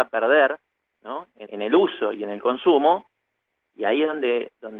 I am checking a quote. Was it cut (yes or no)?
yes